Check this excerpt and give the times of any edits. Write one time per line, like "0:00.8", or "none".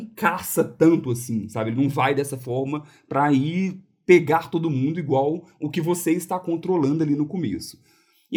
none